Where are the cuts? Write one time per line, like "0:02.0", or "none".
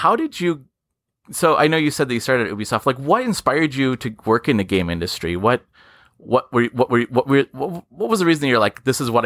0:06.9